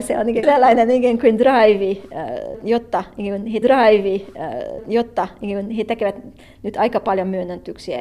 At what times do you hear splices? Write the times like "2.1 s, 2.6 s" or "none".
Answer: 3.6 s

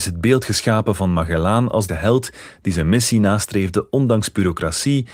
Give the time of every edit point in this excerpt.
1.9 s

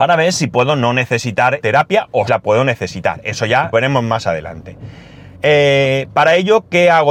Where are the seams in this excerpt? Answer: 1.6 s, 2.3 s, 3.7 s, 5.3 s

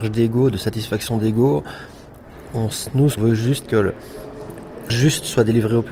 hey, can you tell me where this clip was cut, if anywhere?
3.2 s, 3.6 s, 4.9 s

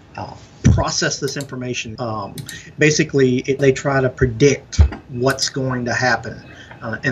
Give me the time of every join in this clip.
1.9 s, 3.6 s

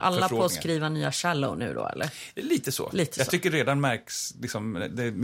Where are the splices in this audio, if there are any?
none

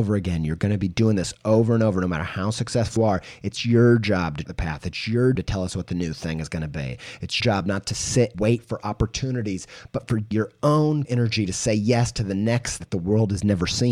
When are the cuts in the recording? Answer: 3.0 s, 4.4 s, 5.3 s, 7.4 s, 8.3 s, 10.3 s, 11.0 s, 12.8 s

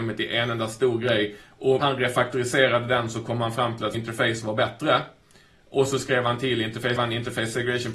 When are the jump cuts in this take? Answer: 1.8 s, 3.9 s, 7.0 s

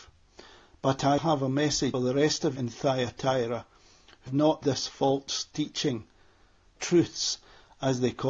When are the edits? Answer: 1.2 s, 1.9 s, 2.6 s, 4.3 s, 4.6 s, 6.8 s

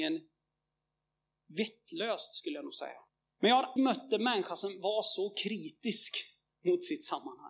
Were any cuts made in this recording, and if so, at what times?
3.1 s, 3.8 s

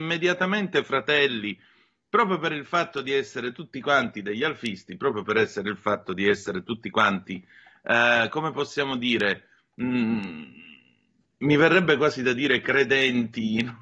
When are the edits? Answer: none

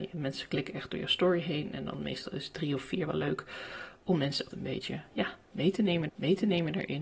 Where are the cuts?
4.5 s, 6.1 s

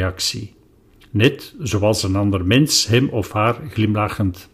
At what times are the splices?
none

